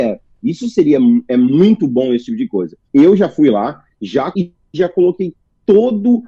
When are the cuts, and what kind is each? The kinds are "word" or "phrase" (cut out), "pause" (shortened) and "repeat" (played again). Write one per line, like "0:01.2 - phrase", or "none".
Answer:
0:02.9 - pause
0:04.3 - word